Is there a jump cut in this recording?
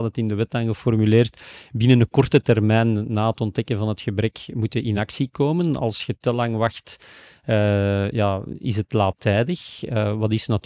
no; 0 cuts

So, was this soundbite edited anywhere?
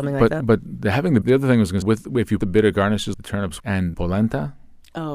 yes; 6 cuts; at 1.2 s, 1.8 s, 2.4 s, 3.1 s, 3.6 s, 3.9 s

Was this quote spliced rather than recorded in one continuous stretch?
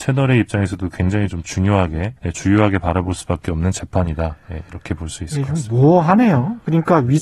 yes; 1 cut; at 2.2 s

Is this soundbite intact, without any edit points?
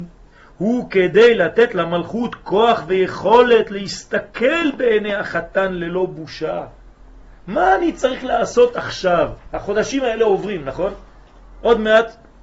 yes; 0 cuts

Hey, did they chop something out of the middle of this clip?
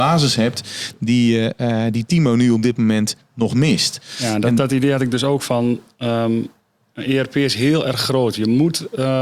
no; 0 cuts

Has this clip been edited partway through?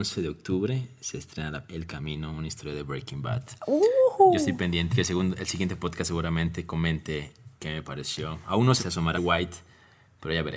yes; 5 cuts; at 1.7 s, 4.9 s, 7.5 s, 8.8 s, 9.1 s

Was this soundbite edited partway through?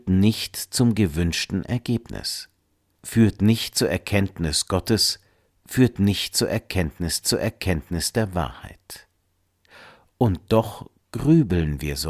yes; 1 cut; at 7.2 s

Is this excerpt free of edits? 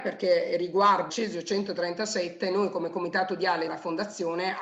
no; 2 cuts; at 1.1 s, 3.7 s

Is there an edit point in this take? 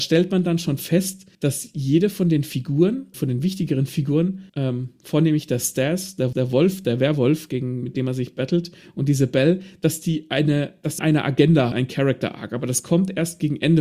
yes; 6 cuts; at 1.3 s, 3.1 s, 4.5 s, 6.3 s, 11.0 s, 11.7 s

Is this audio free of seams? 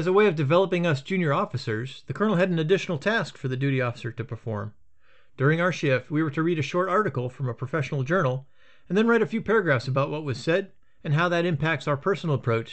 yes; 0 cuts

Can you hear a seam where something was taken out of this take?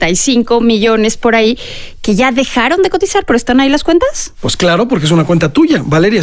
no; 0 cuts

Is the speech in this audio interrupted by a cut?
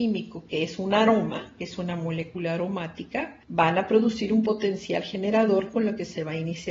yes; 1 cut; at 3.4 s

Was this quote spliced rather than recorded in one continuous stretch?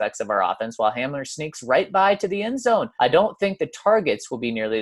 yes; 1 cut; at 2.9 s

